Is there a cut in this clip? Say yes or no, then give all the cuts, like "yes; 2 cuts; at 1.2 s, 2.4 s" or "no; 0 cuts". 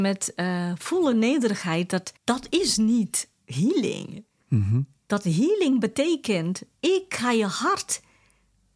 yes; 3 cuts; at 1.1 s, 2.2 s, 6.8 s